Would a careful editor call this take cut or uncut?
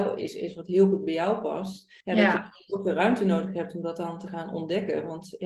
cut